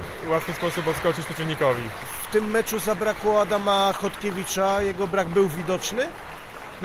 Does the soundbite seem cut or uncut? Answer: uncut